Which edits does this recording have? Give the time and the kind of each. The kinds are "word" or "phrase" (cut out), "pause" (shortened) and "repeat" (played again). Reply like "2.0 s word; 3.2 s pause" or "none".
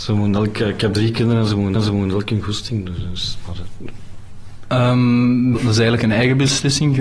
1.8 s repeat; 5.5 s word